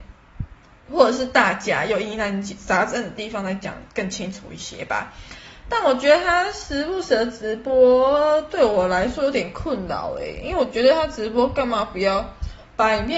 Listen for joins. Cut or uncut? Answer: uncut